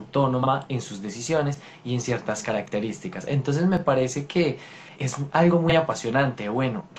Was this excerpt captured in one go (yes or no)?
no